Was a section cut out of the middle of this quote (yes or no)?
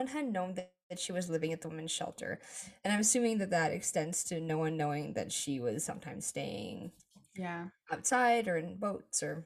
no